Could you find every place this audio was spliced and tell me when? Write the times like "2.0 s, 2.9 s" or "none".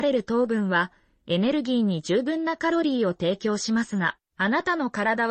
none